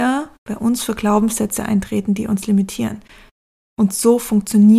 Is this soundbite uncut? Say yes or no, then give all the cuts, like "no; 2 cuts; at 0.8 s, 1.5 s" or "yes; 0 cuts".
yes; 0 cuts